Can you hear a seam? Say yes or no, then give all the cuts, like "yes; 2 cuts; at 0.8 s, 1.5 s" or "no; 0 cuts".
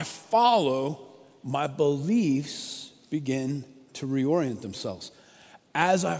no; 0 cuts